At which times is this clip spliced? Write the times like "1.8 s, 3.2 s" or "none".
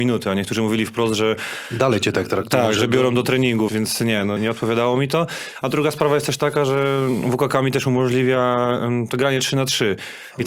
3.7 s, 4.4 s